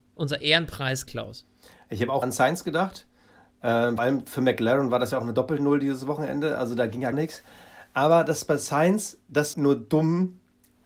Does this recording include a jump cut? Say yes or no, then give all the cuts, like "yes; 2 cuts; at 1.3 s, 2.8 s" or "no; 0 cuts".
yes; 5 cuts; at 1.1 s, 2.2 s, 4.0 s, 7.1 s, 9.5 s